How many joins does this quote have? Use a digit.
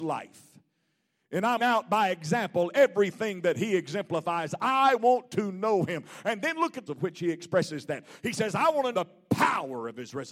3